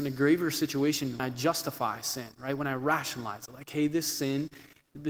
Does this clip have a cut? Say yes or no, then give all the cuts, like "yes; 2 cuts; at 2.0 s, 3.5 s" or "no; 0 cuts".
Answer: yes; 1 cut; at 1.2 s